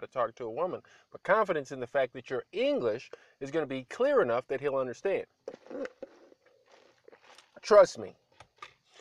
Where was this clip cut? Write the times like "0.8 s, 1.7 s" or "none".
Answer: none